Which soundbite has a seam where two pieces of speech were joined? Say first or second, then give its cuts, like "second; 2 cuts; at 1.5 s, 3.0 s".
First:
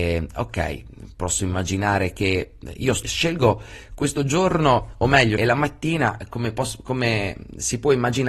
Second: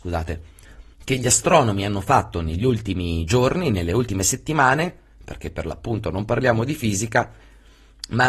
first; 2 cuts; at 3.0 s, 5.4 s